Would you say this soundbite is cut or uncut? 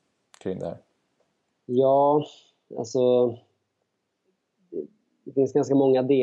uncut